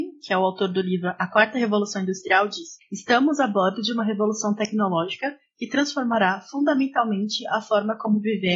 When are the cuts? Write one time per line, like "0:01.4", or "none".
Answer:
none